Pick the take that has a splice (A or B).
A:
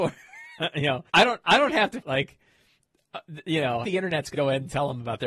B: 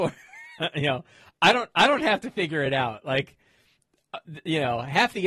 A